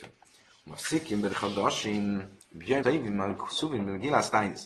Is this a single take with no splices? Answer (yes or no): no